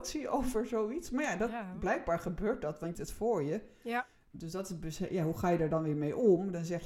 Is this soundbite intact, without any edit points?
no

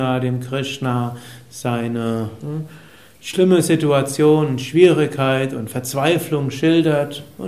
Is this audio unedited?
yes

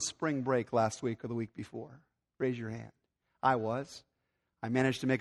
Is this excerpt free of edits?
yes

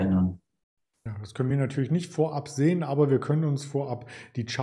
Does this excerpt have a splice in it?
no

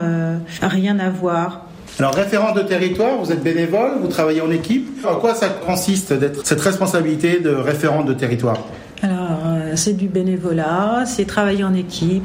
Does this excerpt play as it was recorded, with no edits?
no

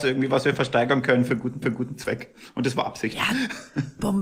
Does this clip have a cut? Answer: yes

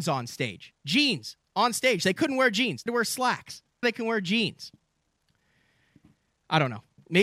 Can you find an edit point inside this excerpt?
yes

